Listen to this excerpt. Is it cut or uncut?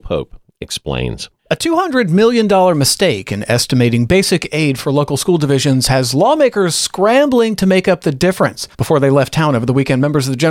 cut